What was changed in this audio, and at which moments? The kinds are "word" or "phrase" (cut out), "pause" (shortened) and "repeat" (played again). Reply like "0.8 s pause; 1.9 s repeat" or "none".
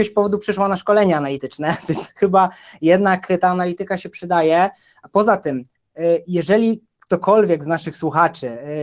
none